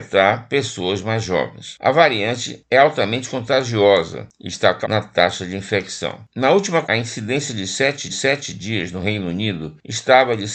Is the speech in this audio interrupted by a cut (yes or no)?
yes